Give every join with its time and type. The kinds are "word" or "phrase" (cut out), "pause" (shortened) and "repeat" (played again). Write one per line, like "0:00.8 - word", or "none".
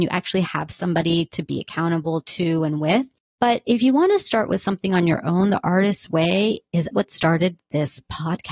0:06.9 - word